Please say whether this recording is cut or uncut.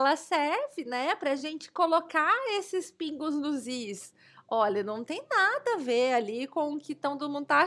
uncut